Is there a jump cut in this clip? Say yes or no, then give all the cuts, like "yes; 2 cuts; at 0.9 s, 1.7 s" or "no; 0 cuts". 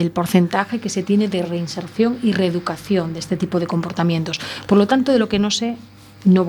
no; 0 cuts